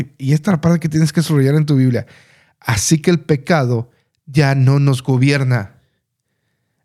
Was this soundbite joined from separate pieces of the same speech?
no; 0 cuts

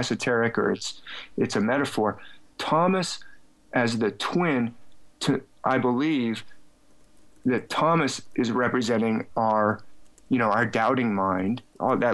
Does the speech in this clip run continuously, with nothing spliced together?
yes; 0 cuts

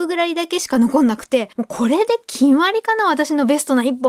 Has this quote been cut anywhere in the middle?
yes; 1 cut; at 1.5 s

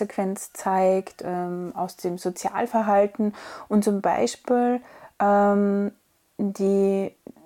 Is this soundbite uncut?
yes; 0 cuts

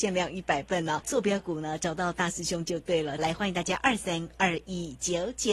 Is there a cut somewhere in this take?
yes; 2 cuts; at 1.0 s, 3.2 s

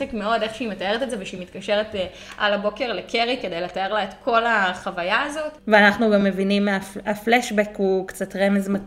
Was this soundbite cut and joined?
no; 0 cuts

